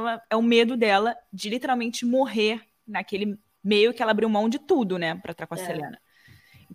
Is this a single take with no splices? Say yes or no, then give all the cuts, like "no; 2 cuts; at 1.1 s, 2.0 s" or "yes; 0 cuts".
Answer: yes; 0 cuts